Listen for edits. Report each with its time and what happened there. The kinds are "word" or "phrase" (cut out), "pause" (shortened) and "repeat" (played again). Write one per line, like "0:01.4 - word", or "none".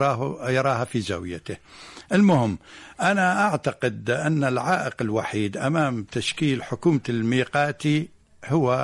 none